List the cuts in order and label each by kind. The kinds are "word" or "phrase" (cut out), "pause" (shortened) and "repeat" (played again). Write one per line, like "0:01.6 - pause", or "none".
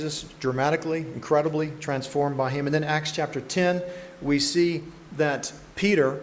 none